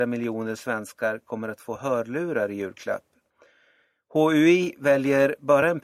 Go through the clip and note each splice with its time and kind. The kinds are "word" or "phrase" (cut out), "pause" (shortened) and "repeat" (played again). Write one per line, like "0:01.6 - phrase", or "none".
none